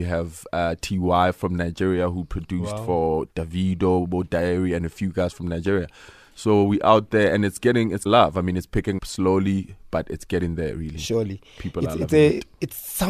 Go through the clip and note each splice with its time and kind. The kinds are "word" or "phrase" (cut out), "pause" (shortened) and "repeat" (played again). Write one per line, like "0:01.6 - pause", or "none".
0:08.1 - word
0:09.0 - word